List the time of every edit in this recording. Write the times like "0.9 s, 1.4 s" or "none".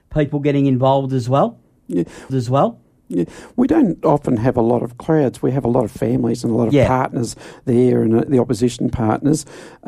2.3 s